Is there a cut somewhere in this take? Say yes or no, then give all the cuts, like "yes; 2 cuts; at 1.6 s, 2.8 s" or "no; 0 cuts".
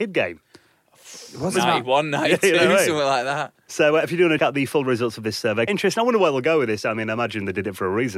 yes; 2 cuts; at 4.4 s, 5.7 s